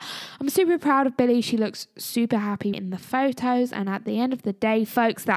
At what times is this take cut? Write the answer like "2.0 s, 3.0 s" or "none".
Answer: 2.7 s